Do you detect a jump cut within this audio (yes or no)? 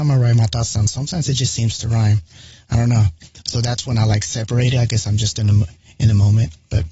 no